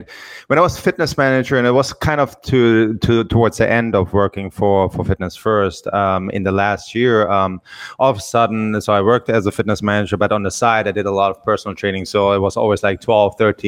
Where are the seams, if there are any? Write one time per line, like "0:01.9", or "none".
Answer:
none